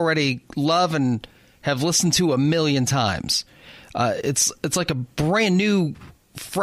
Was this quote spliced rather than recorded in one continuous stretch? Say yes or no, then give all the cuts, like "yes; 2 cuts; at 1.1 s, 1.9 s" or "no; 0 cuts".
no; 0 cuts